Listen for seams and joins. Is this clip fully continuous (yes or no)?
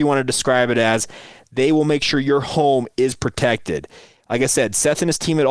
yes